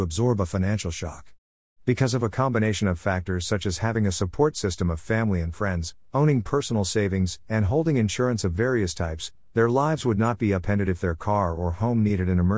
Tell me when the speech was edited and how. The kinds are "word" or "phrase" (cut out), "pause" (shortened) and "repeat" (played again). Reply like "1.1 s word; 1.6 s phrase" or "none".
none